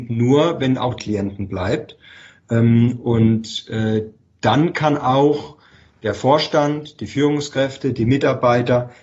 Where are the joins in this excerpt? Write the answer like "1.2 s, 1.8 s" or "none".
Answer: 1.0 s